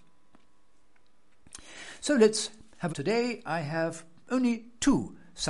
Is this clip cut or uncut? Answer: cut